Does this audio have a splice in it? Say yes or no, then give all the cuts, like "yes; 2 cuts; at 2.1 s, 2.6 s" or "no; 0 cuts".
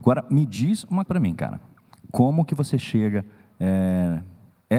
yes; 1 cut; at 1.1 s